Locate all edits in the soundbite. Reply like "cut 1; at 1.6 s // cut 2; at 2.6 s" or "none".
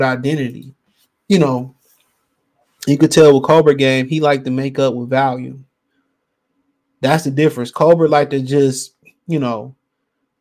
none